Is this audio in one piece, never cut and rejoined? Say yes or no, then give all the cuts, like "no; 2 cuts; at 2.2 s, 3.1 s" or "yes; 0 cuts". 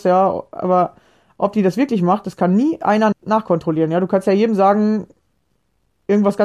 no; 1 cut; at 3.1 s